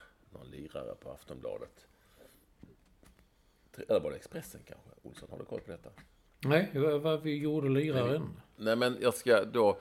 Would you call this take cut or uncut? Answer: uncut